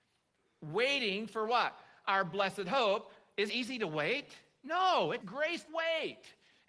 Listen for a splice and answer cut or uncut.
cut